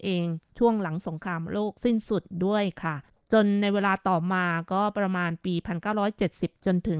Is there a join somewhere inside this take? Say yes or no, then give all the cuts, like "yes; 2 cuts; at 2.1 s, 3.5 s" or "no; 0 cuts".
no; 0 cuts